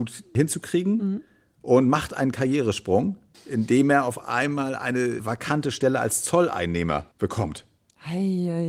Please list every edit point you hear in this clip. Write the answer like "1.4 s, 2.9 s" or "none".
none